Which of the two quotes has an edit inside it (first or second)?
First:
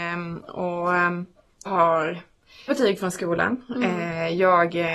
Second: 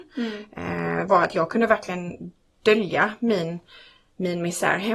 first